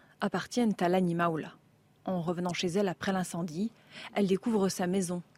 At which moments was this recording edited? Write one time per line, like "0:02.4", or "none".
none

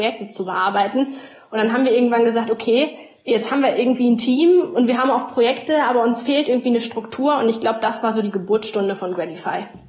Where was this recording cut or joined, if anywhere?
none

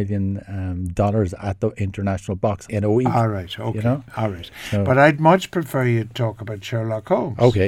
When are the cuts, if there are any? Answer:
0:02.7

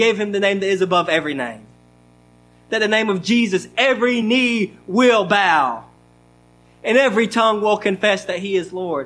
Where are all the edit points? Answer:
none

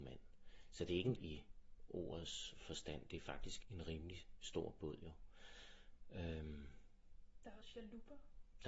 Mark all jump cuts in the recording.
0:01.2
0:03.6
0:07.6

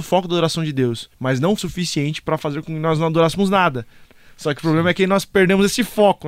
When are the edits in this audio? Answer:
0:01.1
0:01.6

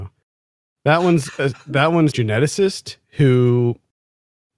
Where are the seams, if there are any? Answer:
0:02.1

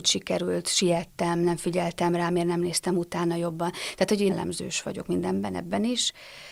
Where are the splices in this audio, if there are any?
0:04.3

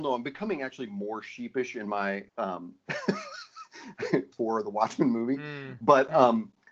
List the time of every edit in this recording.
0:02.3
0:04.3

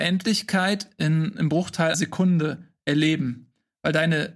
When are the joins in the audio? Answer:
0:01.9

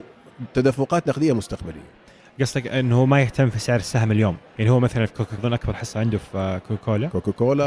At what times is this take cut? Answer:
0:04.5
0:05.4

